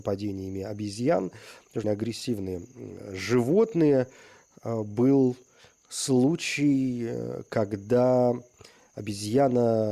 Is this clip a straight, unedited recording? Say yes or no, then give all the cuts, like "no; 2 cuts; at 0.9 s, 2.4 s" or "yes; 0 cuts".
no; 1 cut; at 1.8 s